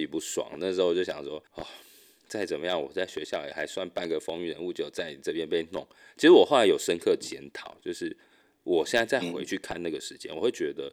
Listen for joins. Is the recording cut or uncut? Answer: cut